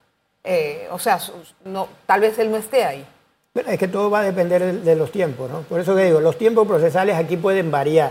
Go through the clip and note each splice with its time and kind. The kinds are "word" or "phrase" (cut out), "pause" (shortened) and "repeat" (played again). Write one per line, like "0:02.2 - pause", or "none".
none